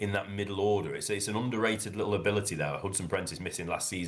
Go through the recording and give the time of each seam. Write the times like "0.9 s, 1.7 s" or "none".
none